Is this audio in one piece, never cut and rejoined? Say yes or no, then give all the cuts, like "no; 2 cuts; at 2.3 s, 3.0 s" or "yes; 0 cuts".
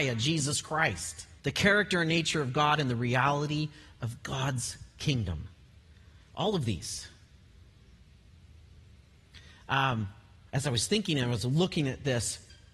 no; 1 cut; at 1.4 s